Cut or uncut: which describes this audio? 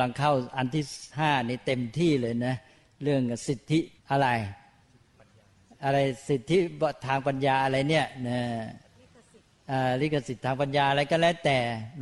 cut